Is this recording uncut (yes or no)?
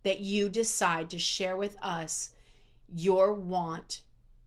yes